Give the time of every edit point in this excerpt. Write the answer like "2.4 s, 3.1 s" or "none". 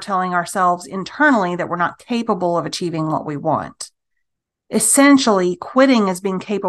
none